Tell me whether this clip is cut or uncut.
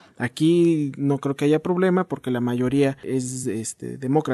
uncut